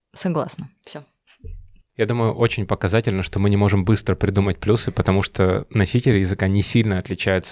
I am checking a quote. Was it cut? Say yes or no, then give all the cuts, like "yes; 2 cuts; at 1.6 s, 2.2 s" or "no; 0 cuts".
no; 0 cuts